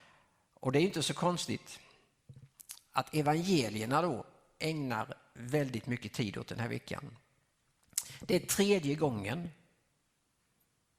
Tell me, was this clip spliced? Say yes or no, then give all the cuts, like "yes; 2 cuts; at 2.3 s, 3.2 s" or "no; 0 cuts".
no; 0 cuts